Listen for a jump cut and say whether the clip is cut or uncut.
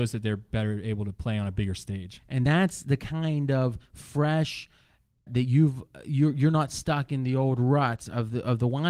cut